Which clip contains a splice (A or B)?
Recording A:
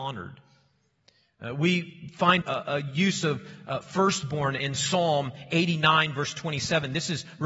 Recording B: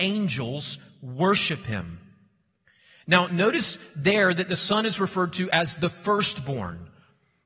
A